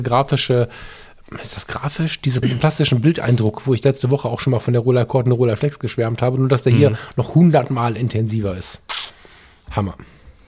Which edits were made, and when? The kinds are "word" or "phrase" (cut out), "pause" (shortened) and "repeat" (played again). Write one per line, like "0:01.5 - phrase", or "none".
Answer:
0:02.4 - word